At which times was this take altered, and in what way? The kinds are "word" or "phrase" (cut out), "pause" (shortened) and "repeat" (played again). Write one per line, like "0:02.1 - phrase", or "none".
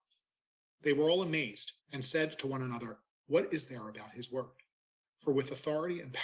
0:01.8 - pause